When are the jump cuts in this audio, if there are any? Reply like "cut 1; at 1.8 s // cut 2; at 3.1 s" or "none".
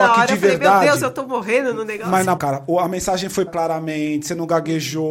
cut 1; at 2.4 s // cut 2; at 3.5 s